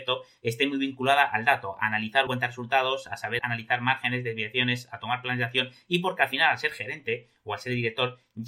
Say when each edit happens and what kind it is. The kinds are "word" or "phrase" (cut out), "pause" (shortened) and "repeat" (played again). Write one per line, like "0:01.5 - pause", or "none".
0:02.3 - word
0:03.4 - word